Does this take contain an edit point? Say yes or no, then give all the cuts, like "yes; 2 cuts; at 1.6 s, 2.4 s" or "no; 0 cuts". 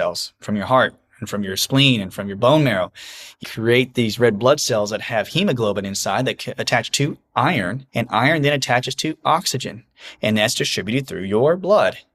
yes; 2 cuts; at 3.4 s, 7.9 s